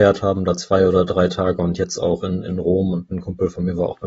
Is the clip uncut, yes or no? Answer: yes